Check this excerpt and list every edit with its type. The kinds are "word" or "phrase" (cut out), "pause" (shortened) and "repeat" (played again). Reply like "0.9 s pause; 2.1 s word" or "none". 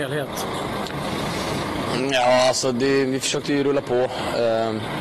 none